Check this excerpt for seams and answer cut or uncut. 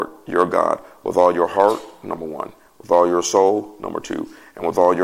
uncut